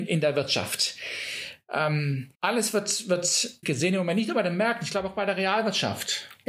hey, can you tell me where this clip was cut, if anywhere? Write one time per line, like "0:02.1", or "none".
0:02.3
0:03.6